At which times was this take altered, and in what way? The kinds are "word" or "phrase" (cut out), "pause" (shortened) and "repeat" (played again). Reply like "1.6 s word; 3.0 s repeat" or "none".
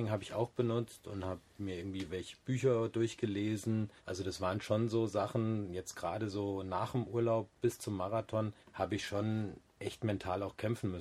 4.0 s pause; 8.6 s pause